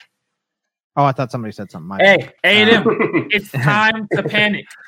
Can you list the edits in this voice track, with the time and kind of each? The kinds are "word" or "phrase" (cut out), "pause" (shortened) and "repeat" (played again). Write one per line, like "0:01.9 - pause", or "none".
0:02.4 - pause

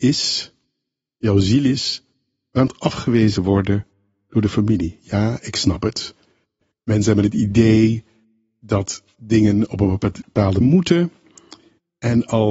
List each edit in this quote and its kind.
0:02.7 - word
0:03.4 - word
0:10.6 - word

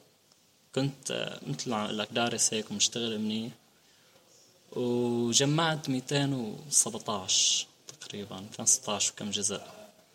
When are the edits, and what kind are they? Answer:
none

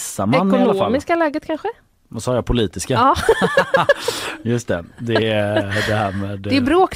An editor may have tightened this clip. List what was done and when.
none

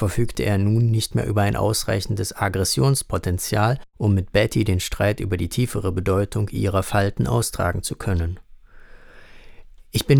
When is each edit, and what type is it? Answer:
none

